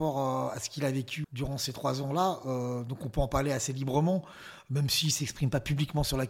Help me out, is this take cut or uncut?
cut